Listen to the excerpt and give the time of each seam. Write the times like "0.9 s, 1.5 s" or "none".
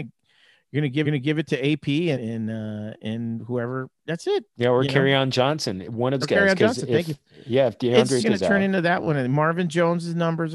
1.0 s, 2.1 s, 4.5 s, 6.2 s, 8.2 s